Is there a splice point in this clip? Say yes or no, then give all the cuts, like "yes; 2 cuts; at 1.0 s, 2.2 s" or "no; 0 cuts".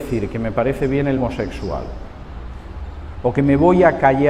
yes; 1 cut; at 1.2 s